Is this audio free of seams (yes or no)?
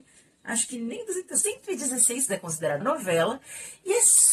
no